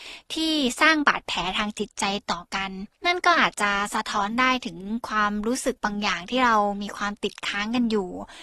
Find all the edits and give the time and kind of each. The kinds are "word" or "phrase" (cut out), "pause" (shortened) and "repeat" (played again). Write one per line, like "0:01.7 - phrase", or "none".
0:02.9 - pause